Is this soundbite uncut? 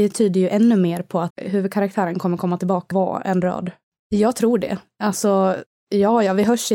no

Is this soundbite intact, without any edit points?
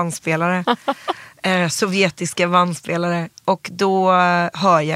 yes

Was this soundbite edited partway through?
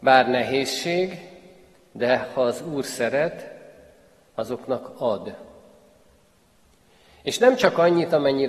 no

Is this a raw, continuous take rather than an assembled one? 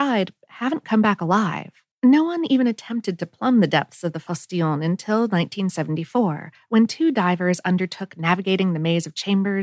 no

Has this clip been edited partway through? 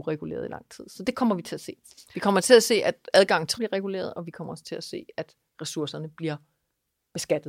yes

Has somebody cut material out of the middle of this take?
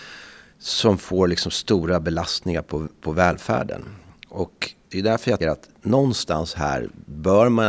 yes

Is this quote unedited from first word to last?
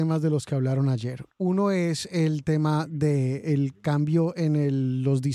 yes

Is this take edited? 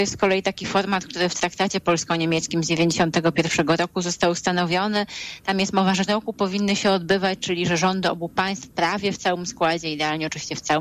yes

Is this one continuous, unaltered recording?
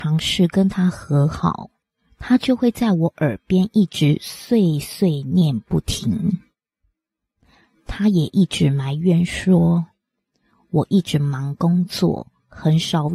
no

